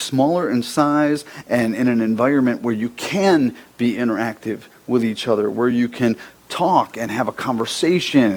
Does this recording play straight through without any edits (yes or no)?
yes